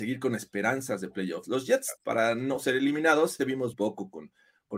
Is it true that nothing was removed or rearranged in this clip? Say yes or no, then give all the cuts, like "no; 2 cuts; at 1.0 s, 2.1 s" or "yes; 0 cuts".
no; 3 cuts; at 2.0 s, 3.4 s, 3.7 s